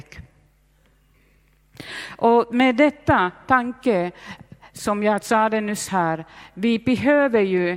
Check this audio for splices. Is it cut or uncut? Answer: uncut